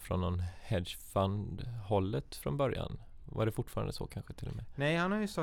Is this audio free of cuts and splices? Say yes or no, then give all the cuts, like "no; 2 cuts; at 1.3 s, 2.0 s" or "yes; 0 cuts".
yes; 0 cuts